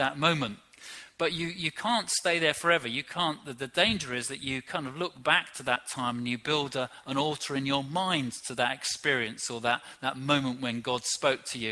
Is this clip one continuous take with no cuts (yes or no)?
yes